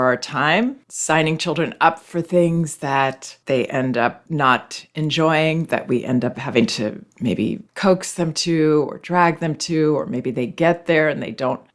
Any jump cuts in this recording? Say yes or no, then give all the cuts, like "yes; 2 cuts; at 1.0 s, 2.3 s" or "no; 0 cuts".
yes; 1 cut; at 7.7 s